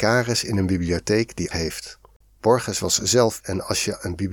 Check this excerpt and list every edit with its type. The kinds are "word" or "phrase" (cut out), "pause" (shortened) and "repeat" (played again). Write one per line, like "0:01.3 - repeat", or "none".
0:01.5 - word
0:02.2 - pause
0:03.4 - word